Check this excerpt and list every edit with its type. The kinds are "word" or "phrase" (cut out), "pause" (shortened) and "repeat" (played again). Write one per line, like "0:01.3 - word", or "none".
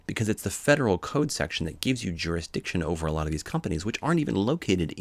none